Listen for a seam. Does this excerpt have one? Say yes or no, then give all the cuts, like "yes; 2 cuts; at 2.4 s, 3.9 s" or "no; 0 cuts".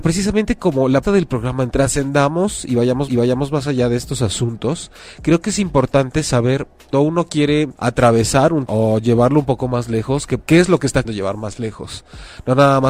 yes; 8 cuts; at 1.0 s, 1.7 s, 3.1 s, 6.9 s, 7.8 s, 8.7 s, 10.4 s, 11.0 s